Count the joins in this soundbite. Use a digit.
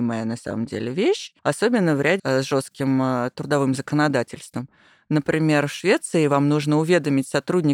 2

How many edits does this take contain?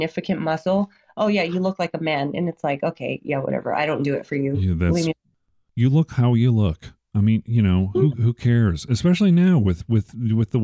0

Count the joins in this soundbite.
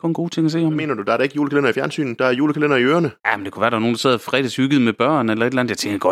1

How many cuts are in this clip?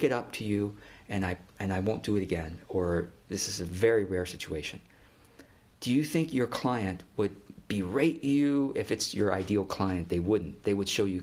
0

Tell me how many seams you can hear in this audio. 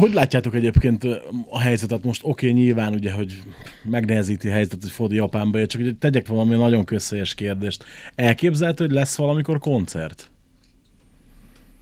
1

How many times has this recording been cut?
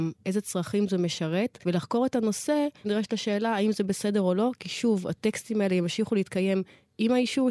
2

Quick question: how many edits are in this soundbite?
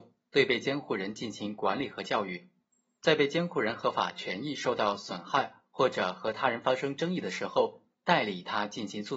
0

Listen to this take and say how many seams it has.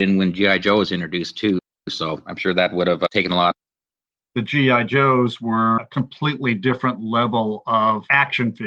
0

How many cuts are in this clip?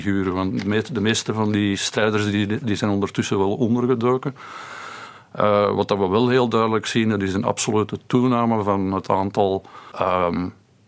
1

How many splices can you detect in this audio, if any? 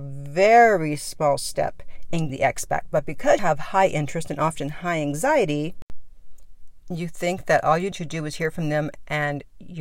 3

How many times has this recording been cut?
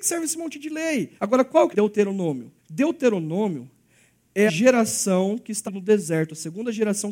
5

